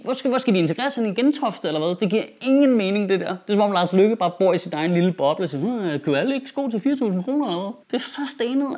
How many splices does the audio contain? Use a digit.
1